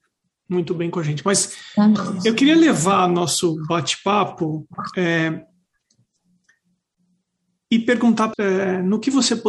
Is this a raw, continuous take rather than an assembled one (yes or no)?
no